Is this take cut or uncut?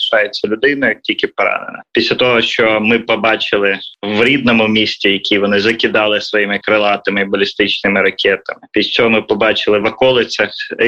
uncut